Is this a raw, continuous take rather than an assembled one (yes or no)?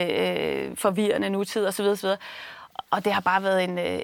yes